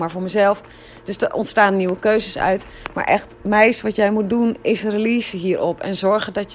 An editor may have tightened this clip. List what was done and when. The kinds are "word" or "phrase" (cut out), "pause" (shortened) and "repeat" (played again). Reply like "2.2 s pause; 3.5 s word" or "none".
3.4 s pause